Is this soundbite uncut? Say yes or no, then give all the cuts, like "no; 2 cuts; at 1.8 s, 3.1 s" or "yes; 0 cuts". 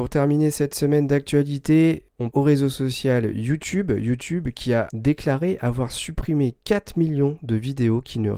no; 1 cut; at 2.3 s